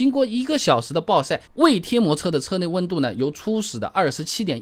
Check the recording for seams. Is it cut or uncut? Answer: cut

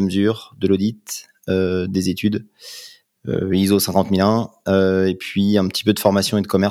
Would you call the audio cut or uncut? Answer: uncut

